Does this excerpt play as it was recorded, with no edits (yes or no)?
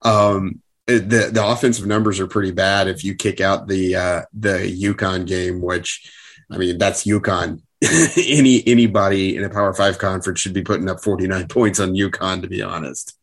yes